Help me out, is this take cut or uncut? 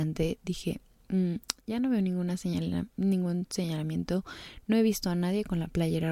uncut